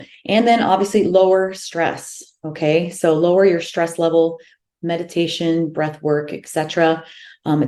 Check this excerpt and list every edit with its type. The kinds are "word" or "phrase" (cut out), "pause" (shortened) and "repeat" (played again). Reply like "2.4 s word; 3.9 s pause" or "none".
none